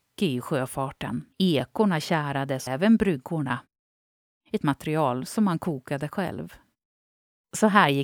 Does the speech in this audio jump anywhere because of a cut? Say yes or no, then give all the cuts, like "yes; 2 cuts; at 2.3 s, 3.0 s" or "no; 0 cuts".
yes; 3 cuts; at 1.3 s, 2.7 s, 4.6 s